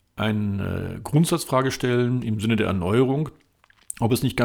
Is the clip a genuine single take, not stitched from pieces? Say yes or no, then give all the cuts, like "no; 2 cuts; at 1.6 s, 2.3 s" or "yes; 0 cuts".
yes; 0 cuts